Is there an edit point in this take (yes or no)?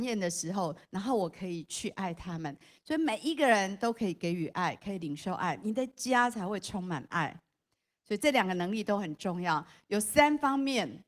no